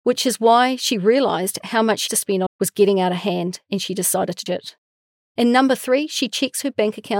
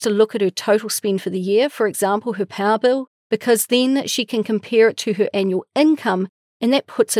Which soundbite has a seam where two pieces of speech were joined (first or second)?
first